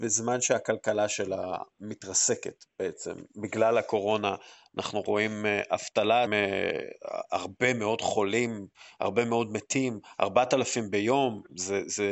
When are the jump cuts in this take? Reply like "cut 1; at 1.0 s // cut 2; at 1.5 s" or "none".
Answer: cut 1; at 6.3 s